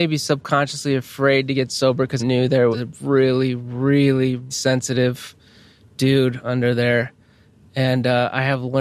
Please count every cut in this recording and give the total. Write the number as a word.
three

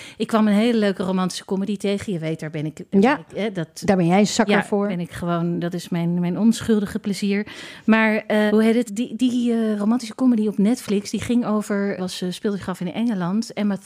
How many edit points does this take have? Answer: three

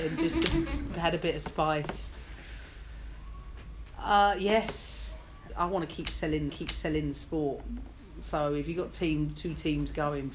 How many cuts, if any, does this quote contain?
two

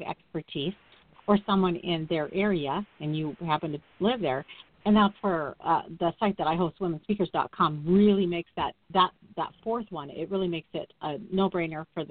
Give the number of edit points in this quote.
one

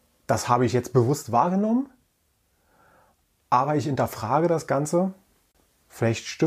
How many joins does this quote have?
zero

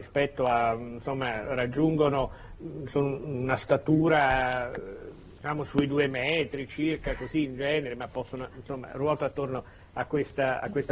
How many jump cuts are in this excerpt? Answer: one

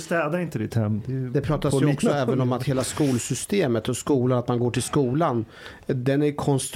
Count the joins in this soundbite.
zero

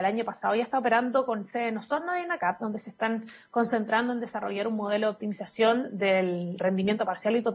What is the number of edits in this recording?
zero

